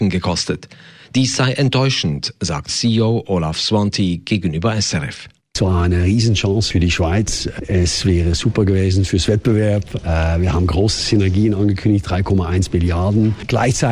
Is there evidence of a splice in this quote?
yes; 1 cut; at 2.7 s

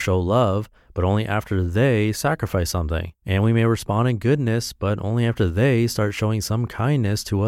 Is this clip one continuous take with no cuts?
no; 1 cut; at 3.2 s

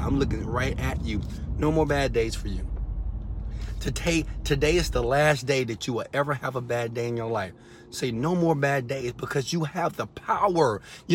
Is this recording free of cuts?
yes; 0 cuts

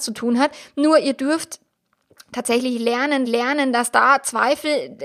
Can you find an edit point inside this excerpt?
yes; 1 cut; at 3.2 s

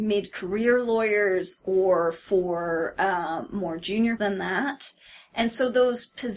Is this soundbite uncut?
no; 1 cut; at 4.2 s

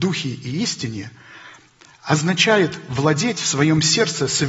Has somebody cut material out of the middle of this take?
no; 0 cuts

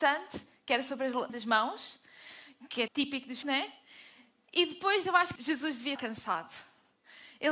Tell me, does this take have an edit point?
yes; 6 cuts; at 1.3 s, 2.9 s, 3.4 s, 5.0 s, 5.4 s, 6.0 s

